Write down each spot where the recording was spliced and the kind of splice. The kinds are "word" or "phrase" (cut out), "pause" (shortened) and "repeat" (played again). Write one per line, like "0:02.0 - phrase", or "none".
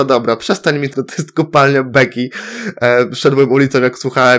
0:00.9 - word